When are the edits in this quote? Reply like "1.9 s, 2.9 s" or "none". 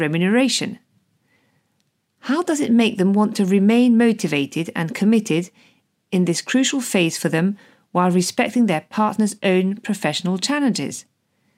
none